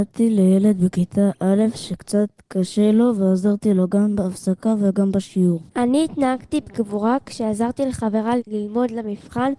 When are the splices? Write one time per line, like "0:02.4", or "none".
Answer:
0:05.7
0:08.4